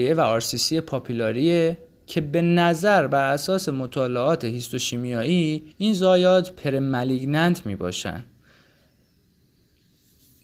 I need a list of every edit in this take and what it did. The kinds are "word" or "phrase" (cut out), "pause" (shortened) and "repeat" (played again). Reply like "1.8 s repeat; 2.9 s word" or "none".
5.7 s pause